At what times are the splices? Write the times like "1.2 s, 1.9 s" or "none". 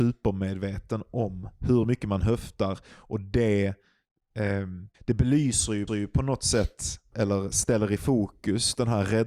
1.6 s, 4.9 s, 5.9 s, 7.1 s